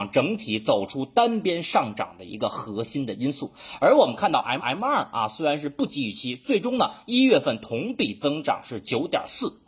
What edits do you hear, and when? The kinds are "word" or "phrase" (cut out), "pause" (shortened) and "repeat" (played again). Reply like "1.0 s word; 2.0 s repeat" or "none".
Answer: 4.6 s repeat